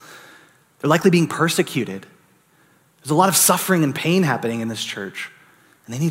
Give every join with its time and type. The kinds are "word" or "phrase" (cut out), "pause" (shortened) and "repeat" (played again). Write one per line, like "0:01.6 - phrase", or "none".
none